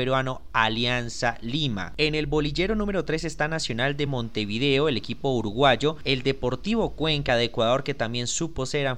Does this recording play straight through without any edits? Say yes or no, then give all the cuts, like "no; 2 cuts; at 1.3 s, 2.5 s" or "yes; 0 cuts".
yes; 0 cuts